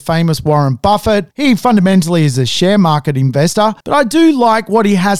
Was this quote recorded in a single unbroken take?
no; 2 cuts; at 1.3 s, 3.8 s

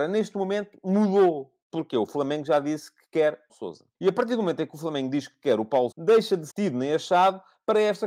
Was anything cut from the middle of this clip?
yes; 5 cuts; at 1.6 s, 3.5 s, 3.9 s, 5.9 s, 6.5 s

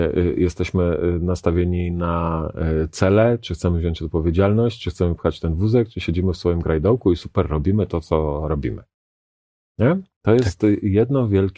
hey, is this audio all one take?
yes; 0 cuts

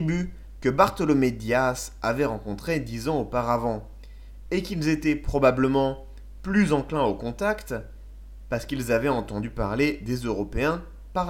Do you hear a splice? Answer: no; 0 cuts

